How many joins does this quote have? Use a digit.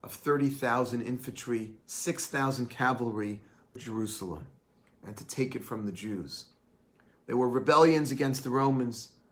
2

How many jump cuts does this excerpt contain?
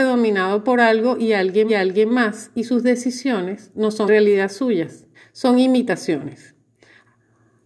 3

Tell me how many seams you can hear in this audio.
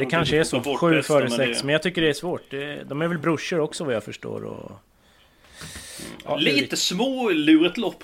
0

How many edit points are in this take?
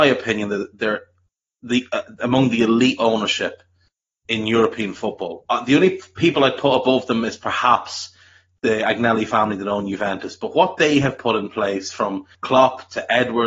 1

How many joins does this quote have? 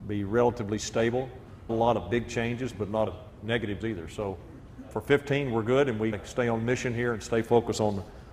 4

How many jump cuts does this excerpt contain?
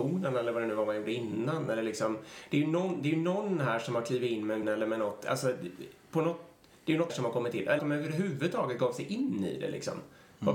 3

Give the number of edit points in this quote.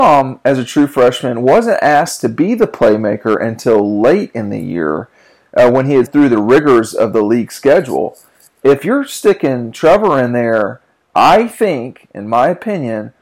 1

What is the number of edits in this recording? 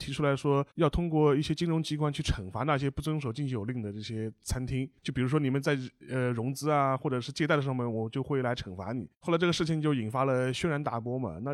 1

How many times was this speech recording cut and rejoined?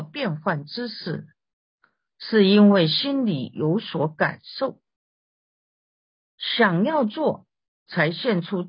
0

